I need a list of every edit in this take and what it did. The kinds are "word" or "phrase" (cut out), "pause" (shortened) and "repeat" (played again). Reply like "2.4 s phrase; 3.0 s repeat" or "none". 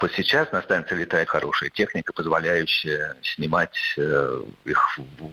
1.3 s word